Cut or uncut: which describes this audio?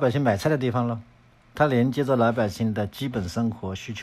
uncut